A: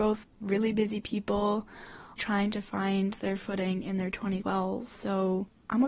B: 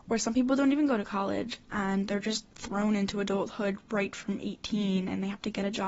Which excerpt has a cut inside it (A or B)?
A